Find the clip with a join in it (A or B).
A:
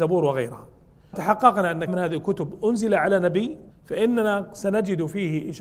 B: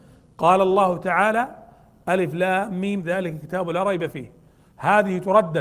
A